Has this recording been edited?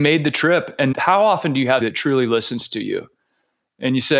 yes; 2 cuts; at 0.9 s, 1.8 s

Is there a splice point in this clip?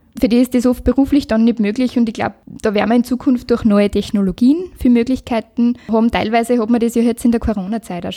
no; 0 cuts

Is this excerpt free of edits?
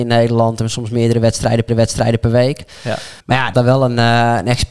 no; 3 cuts; at 1.7 s, 3.2 s, 3.5 s

